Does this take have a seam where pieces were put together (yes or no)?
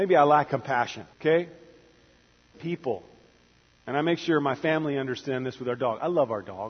yes